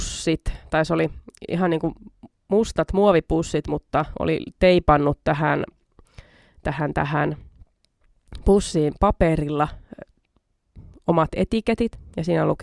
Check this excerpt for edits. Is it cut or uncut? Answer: uncut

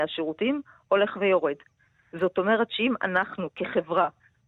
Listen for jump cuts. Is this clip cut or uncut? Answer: uncut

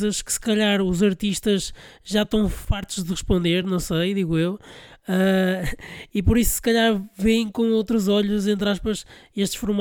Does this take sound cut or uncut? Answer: uncut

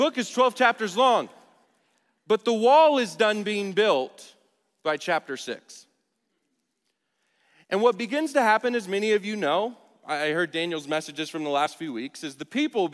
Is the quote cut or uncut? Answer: uncut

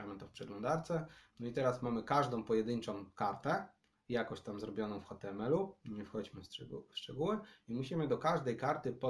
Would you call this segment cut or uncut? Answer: uncut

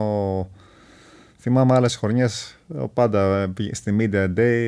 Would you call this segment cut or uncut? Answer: uncut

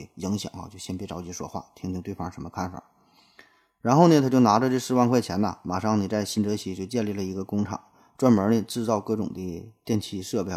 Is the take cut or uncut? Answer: uncut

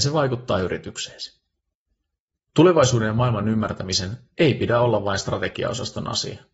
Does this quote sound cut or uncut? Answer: uncut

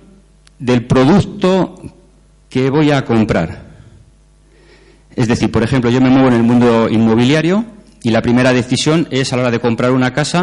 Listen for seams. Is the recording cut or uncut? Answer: uncut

